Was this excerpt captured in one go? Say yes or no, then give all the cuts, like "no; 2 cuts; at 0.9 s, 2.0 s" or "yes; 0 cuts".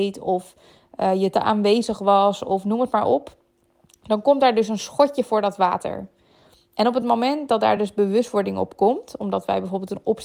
yes; 0 cuts